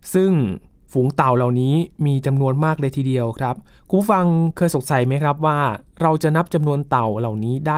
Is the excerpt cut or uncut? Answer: uncut